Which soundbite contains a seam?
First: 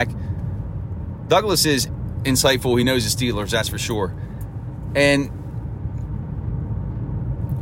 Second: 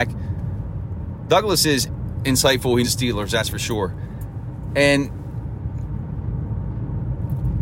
second; 1 cut; at 2.8 s

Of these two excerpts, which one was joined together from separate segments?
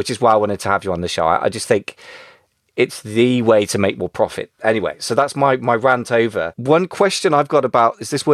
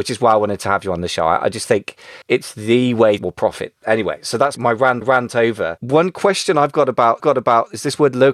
second; 5 cuts; at 2.2 s, 3.2 s, 4.6 s, 5.0 s, 7.2 s

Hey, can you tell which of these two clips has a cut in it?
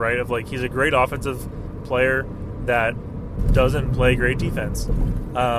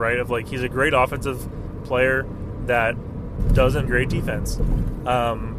second; 1 cut; at 3.9 s

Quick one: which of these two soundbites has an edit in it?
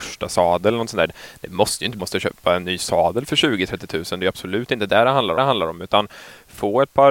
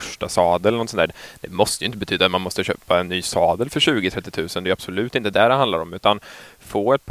first; 2 cuts; at 2.0 s, 5.4 s

